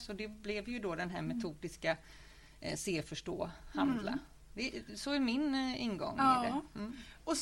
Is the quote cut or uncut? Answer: uncut